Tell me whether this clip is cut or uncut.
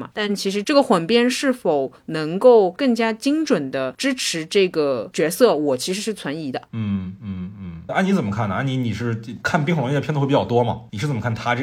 cut